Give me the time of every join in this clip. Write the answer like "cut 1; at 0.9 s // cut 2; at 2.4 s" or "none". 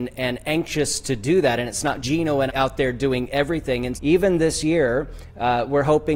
cut 1; at 2.0 s // cut 2; at 2.5 s // cut 3; at 3.9 s